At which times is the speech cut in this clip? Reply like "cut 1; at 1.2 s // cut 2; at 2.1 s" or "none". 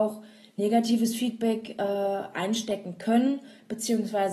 none